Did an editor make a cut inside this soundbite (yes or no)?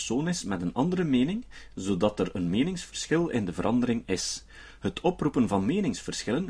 no